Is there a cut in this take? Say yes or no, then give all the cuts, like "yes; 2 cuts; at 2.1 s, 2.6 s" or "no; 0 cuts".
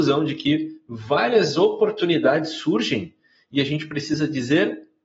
no; 0 cuts